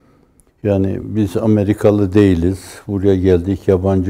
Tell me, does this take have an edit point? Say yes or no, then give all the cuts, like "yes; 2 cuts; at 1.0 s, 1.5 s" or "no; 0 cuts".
no; 0 cuts